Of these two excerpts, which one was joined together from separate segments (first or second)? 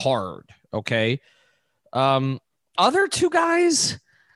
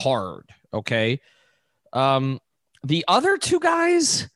first